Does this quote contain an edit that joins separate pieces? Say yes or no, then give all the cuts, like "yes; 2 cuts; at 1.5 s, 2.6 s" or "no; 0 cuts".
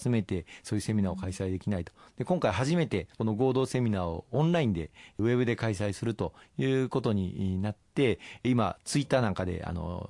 yes; 1 cut; at 3.1 s